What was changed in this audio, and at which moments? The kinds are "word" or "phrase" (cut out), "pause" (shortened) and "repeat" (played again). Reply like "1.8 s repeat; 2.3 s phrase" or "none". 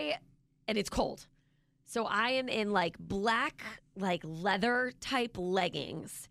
none